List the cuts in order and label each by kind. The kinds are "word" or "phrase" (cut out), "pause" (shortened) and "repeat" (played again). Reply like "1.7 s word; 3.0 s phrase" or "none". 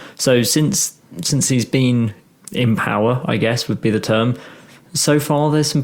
none